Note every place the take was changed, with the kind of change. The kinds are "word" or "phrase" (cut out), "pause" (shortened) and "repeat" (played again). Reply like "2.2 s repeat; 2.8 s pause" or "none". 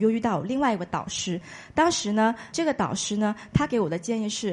2.5 s word